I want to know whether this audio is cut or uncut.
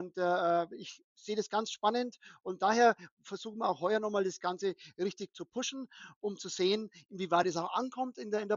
uncut